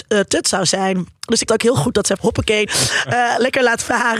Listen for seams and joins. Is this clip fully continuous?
no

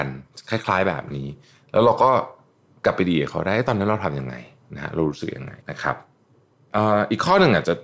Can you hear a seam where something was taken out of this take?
yes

